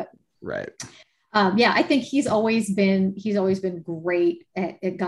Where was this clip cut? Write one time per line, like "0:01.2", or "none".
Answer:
none